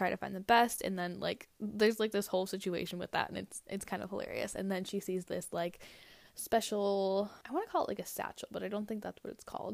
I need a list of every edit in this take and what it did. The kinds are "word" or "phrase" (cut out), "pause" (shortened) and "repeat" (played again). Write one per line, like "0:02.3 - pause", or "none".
0:07.4 - pause